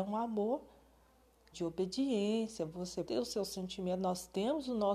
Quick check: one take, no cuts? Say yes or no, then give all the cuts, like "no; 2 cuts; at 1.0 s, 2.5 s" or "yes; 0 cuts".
no; 2 cuts; at 1.5 s, 3.1 s